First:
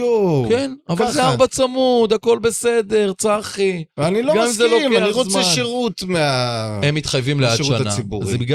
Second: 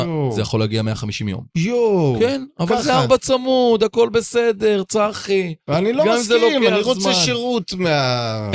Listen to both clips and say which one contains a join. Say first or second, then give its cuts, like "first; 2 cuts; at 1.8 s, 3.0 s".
second; 1 cut; at 1.5 s